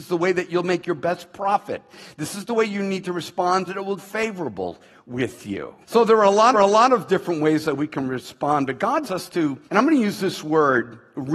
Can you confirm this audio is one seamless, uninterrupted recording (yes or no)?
no